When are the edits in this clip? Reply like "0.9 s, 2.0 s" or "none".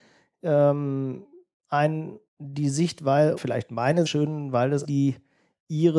2.3 s, 3.4 s, 4.1 s, 4.8 s